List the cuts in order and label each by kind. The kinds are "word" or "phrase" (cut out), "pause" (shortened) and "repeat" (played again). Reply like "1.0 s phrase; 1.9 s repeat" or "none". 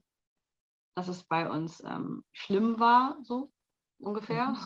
2.3 s pause